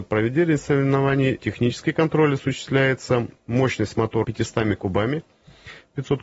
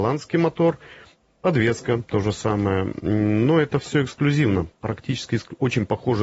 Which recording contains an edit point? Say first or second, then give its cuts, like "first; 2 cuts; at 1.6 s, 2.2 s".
first; 2 cuts; at 1.4 s, 4.2 s